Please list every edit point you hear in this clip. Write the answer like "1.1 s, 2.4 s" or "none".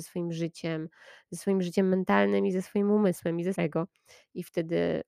3.5 s